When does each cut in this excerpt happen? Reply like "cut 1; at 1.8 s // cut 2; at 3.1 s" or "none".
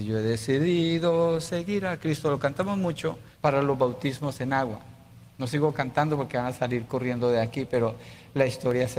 cut 1; at 3.3 s